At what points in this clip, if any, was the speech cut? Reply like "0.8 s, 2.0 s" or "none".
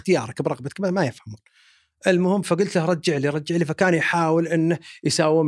none